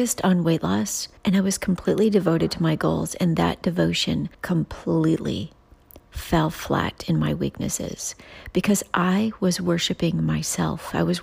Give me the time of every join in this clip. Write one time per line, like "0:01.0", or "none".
0:01.2
0:04.3